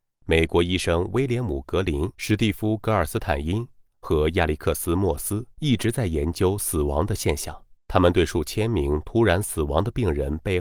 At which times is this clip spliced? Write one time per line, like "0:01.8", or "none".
0:02.1
0:05.5
0:07.8